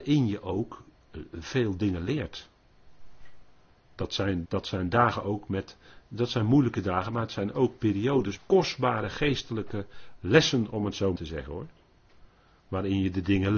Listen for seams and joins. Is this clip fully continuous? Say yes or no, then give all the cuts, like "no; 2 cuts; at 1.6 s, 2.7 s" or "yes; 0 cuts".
no; 3 cuts; at 4.4 s, 8.4 s, 11.2 s